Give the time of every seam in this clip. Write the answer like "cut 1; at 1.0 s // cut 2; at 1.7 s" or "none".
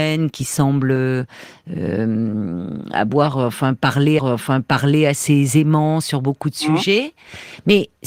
cut 1; at 4.2 s